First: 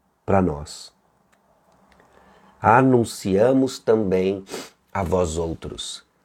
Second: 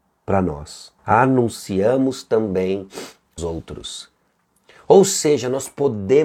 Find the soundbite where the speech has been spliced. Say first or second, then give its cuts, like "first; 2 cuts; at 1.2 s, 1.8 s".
second; 2 cuts; at 1.0 s, 3.4 s